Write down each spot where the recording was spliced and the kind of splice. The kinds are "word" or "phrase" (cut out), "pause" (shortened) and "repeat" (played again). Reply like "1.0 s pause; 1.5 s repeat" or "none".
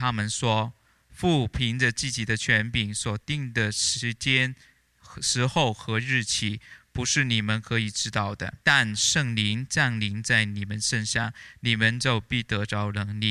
8.6 s pause